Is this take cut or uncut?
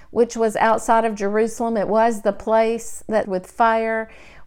cut